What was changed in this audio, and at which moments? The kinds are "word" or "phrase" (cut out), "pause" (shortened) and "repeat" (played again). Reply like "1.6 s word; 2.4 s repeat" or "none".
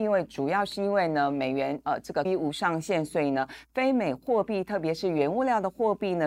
2.2 s word